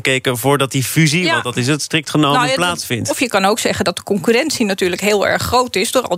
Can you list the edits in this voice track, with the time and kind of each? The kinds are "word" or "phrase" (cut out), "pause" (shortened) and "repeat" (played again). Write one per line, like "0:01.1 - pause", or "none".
none